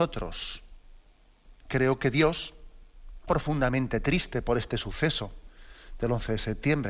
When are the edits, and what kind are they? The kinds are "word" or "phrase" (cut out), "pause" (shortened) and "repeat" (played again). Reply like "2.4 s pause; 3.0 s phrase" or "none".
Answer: 3.3 s word